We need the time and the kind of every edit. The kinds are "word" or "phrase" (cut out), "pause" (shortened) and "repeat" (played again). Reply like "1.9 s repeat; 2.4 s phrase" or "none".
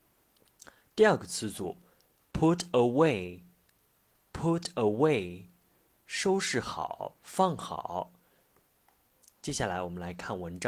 none